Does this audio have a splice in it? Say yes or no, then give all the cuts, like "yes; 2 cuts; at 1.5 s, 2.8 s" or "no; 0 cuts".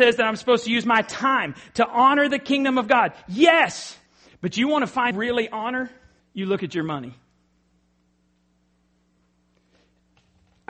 yes; 3 cuts; at 4.1 s, 5.1 s, 6.2 s